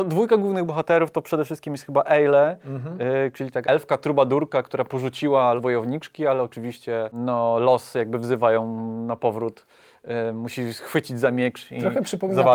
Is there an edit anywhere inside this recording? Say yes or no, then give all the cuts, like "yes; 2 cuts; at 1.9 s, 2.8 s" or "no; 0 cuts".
yes; 2 cuts; at 3.6 s, 5.6 s